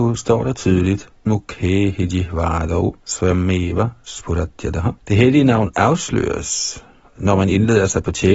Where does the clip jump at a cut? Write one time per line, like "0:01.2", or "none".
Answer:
0:01.3
0:03.0
0:05.0